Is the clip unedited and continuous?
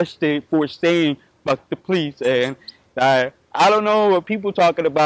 yes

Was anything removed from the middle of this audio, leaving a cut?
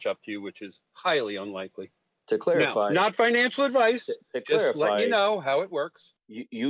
no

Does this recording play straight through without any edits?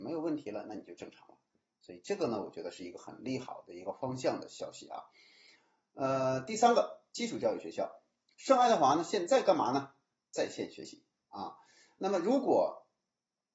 yes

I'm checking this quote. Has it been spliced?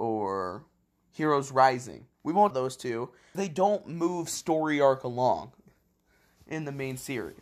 yes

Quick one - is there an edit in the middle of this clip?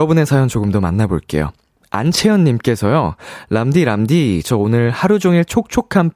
no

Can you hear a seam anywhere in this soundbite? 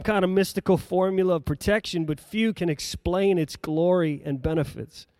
yes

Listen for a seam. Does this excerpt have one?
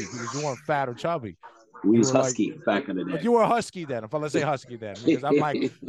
no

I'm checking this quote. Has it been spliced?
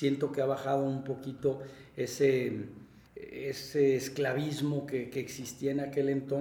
yes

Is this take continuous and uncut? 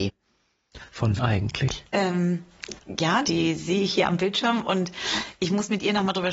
no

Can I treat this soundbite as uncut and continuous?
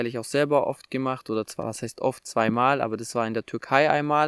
yes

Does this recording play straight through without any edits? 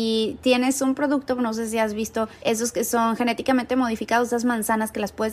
yes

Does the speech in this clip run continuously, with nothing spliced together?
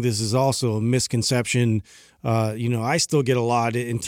yes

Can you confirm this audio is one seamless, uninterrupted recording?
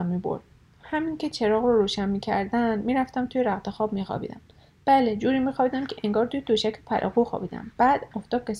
yes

